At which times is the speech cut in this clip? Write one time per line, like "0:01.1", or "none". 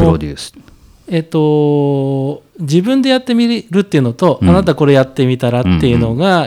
none